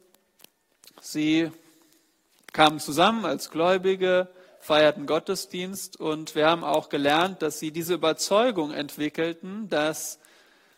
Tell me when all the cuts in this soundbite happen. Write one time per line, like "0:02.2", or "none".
none